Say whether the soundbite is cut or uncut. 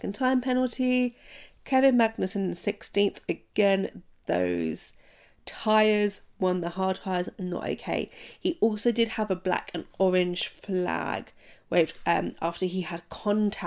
uncut